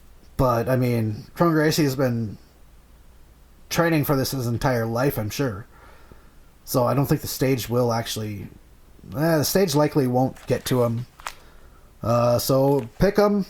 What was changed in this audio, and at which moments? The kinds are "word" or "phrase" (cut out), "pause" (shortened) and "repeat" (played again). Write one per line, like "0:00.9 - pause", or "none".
none